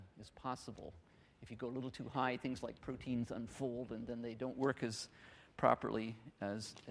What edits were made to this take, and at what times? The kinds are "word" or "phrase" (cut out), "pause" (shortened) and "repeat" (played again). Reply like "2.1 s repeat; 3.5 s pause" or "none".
none